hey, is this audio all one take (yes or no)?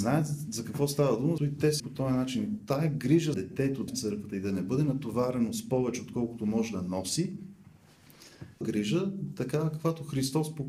no